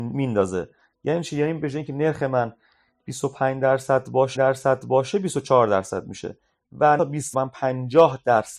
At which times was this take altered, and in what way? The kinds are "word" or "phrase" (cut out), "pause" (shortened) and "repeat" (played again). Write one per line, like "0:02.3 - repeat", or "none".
0:04.4 - repeat
0:07.0 - phrase
0:07.3 - phrase